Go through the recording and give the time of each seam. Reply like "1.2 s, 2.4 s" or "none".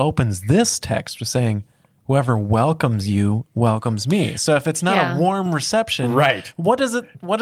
none